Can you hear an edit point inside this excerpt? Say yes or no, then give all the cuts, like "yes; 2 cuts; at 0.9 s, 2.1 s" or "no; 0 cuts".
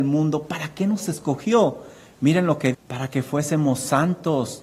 yes; 1 cut; at 2.7 s